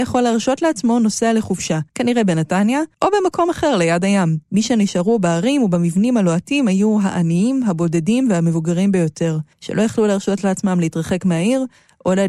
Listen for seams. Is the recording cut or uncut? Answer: cut